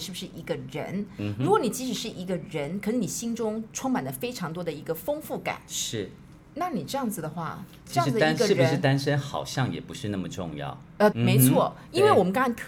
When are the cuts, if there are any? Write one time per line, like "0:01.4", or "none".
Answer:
0:11.1